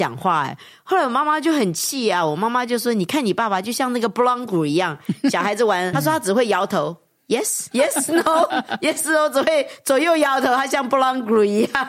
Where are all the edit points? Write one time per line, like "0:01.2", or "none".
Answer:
0:05.9
0:07.7